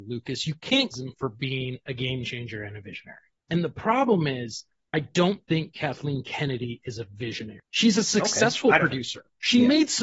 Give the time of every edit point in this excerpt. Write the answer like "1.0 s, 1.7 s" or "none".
0.9 s